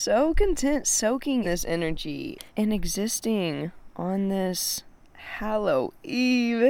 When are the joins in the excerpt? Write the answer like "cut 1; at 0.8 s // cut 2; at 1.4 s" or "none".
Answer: cut 1; at 1.4 s // cut 2; at 2.5 s